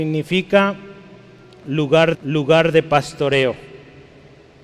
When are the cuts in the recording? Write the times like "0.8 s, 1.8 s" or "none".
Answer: 2.1 s